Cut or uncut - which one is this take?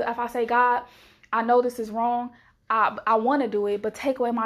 uncut